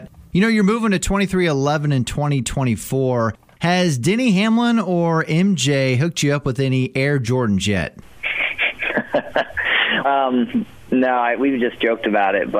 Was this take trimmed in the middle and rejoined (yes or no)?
yes